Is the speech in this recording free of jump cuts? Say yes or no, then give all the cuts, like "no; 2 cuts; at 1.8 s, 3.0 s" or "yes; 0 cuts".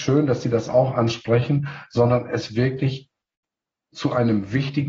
yes; 0 cuts